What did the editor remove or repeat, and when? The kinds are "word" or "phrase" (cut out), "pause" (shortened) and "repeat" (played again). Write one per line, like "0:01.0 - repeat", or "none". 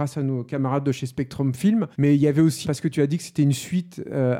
0:01.9 - pause
0:02.6 - word